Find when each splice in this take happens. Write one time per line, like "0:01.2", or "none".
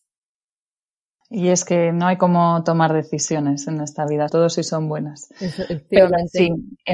0:04.3